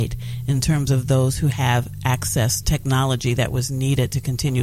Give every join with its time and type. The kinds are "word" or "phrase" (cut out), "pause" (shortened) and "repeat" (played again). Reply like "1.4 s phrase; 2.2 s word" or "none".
2.6 s phrase